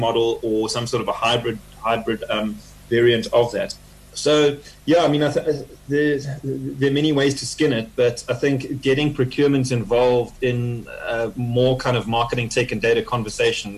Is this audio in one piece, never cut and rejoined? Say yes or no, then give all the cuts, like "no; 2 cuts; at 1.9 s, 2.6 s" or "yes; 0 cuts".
yes; 0 cuts